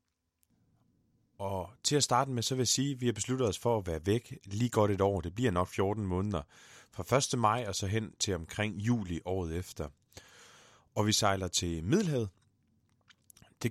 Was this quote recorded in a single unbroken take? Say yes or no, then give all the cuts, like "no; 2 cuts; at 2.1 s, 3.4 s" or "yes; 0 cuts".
yes; 0 cuts